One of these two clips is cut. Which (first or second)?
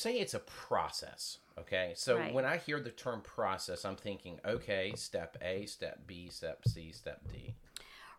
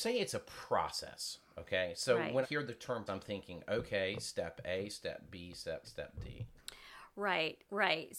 second